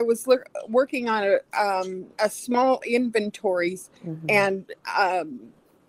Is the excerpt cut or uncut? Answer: cut